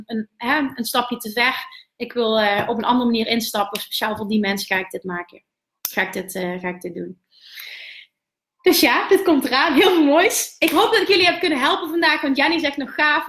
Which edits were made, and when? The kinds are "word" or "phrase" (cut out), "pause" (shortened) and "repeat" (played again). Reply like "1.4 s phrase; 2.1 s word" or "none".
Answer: none